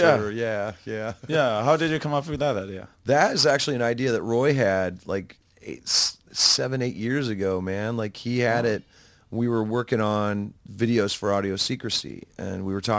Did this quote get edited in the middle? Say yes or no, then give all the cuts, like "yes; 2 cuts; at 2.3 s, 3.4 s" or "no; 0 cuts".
no; 0 cuts